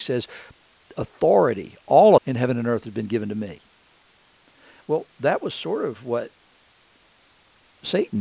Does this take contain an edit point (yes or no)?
yes